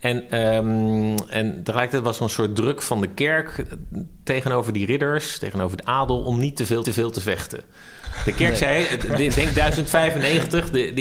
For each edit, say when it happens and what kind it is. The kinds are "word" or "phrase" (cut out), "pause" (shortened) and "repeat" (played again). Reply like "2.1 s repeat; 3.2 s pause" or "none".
6.8 s repeat